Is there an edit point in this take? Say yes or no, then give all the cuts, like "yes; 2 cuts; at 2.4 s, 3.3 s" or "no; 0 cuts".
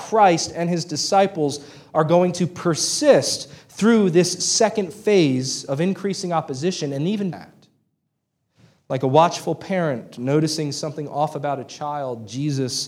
yes; 1 cut; at 7.3 s